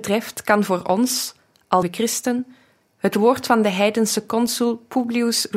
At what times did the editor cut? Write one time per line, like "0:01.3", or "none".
0:01.8